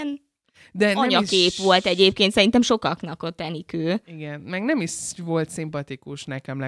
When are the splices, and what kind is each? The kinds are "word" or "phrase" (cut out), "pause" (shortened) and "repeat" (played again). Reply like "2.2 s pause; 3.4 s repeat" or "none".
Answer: none